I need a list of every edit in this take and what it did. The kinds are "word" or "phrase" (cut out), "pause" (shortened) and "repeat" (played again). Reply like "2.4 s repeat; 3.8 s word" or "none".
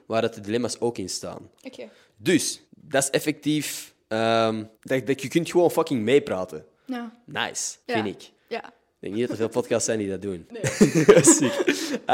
2.6 s pause; 4.7 s pause; 7.8 s pause; 8.4 s pause